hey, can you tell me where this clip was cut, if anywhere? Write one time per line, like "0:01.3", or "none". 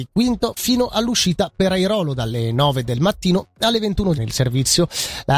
0:04.2